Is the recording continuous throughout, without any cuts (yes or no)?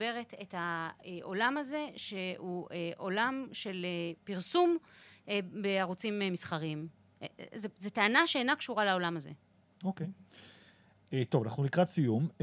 yes